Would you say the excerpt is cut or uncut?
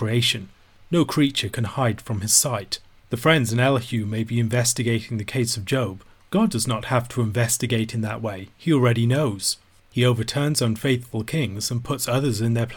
uncut